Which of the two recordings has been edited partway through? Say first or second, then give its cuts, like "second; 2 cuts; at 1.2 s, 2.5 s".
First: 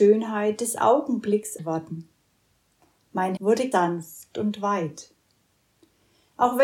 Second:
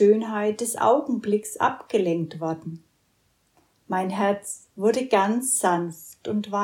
first; 3 cuts; at 1.6 s, 3.4 s, 3.7 s